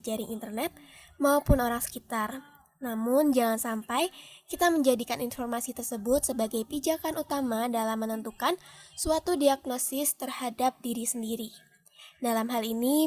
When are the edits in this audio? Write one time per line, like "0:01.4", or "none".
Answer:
none